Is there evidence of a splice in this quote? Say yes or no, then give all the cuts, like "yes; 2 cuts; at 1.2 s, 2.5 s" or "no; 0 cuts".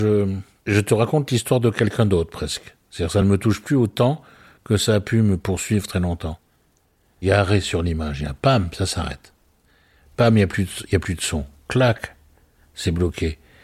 no; 0 cuts